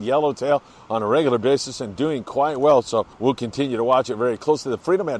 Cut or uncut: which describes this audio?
cut